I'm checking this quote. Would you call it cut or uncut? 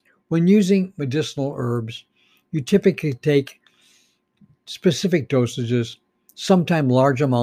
uncut